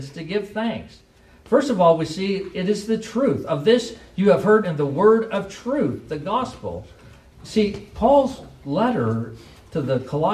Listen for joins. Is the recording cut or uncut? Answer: cut